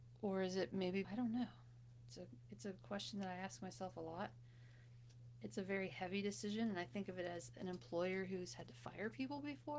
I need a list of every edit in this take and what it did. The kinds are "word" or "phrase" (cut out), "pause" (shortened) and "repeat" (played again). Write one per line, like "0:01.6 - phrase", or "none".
0:01.0 - phrase